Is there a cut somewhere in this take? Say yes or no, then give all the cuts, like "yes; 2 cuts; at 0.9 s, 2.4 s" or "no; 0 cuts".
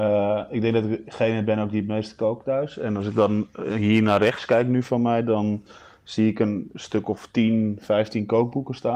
no; 0 cuts